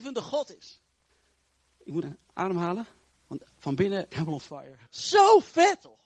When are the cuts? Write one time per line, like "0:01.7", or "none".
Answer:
0:01.1
0:02.0
0:03.5
0:04.1
0:04.9